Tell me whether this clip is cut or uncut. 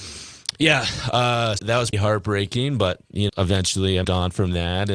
cut